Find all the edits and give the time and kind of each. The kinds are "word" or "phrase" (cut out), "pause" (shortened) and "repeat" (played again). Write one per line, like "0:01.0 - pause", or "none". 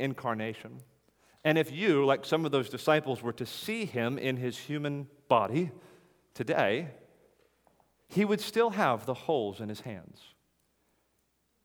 none